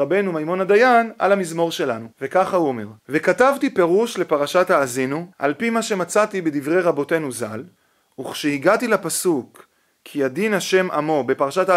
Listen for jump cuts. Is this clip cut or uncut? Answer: cut